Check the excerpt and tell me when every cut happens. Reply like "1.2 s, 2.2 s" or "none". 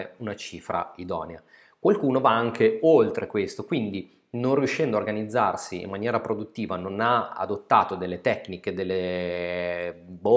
none